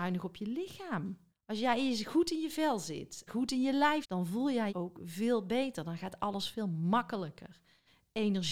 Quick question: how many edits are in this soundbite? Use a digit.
4